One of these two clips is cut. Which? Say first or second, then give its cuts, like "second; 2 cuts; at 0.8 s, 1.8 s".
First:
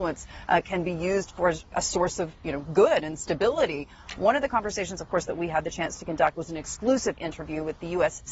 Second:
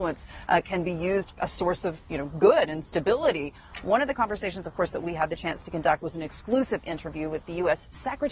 second; 1 cut; at 1.3 s